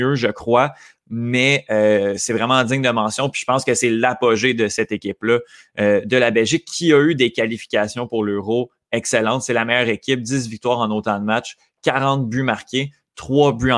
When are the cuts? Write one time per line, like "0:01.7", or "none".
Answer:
none